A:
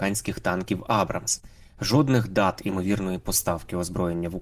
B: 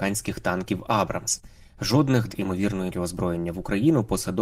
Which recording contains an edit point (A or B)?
B